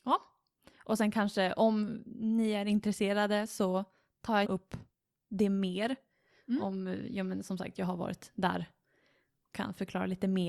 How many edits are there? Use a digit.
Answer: 1